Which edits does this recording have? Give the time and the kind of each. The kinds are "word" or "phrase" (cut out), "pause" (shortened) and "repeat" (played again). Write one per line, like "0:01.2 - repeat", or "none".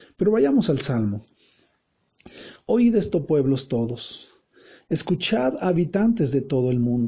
none